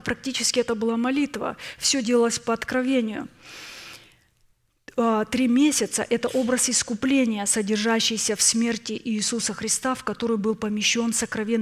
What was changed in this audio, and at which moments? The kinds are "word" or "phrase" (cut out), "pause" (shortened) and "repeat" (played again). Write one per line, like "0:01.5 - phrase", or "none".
none